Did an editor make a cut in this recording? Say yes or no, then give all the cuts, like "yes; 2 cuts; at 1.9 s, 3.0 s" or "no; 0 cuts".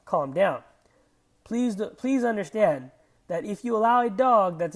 no; 0 cuts